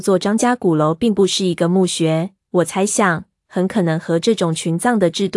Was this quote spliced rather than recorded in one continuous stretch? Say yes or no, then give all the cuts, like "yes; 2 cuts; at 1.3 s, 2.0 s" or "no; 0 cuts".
no; 0 cuts